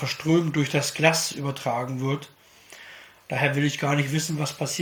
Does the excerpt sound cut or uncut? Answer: uncut